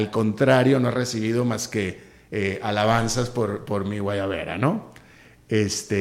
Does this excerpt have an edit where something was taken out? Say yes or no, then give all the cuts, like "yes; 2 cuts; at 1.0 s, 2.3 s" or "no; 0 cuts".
no; 0 cuts